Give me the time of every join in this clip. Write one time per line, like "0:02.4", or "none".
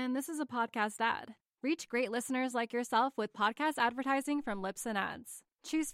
none